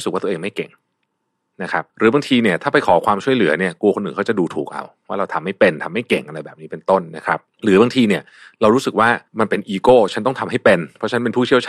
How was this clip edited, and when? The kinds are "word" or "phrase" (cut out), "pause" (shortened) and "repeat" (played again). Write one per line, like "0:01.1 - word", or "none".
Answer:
0:01.9 - pause
0:09.3 - pause